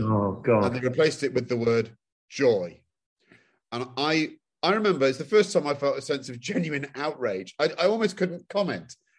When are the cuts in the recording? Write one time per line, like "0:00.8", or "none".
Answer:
none